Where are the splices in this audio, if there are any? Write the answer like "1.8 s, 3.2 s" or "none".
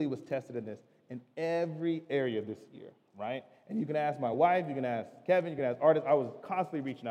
none